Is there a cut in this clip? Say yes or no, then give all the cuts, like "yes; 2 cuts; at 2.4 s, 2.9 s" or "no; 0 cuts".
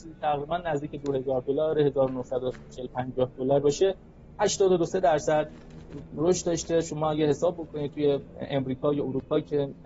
no; 0 cuts